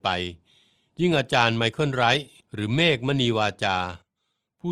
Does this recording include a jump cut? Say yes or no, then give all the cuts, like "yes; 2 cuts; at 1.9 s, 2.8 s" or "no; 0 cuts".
yes; 1 cut; at 2.4 s